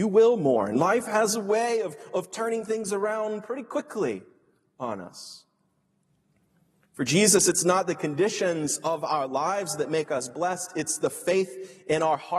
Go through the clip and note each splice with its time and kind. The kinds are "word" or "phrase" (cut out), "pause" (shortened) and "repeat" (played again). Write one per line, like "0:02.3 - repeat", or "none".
none